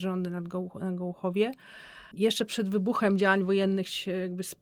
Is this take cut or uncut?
cut